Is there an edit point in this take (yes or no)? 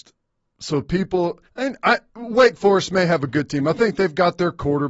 yes